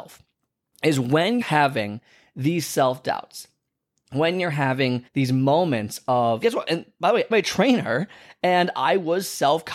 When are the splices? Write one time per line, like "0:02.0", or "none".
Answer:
0:01.4
0:05.1
0:06.4
0:07.3